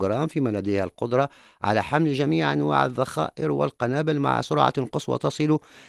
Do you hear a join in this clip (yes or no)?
no